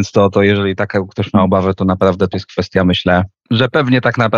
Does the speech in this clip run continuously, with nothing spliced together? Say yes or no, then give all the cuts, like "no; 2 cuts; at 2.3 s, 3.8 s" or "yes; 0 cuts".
no; 1 cut; at 2.3 s